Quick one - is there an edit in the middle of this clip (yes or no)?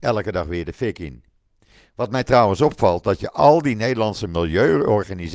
no